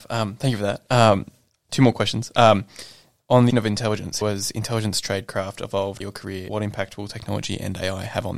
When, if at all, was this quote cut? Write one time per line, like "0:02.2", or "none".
0:01.7
0:03.5
0:04.2
0:06.0
0:06.5

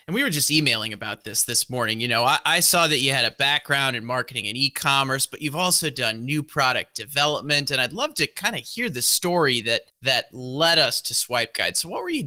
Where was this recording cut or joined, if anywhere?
0:09.9

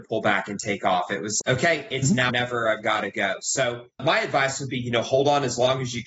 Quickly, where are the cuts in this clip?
0:01.4
0:02.3

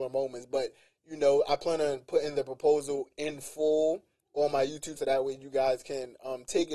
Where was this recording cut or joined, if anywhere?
0:05.0

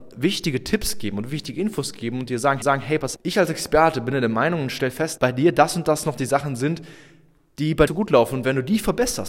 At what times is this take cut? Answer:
0:02.6
0:03.2
0:05.2
0:07.9

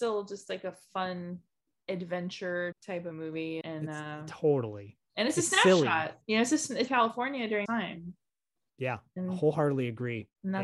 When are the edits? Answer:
0:02.7
0:03.1
0:03.6
0:06.2
0:06.9
0:07.7

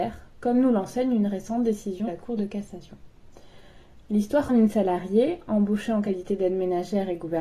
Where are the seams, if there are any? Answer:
0:02.1
0:04.5

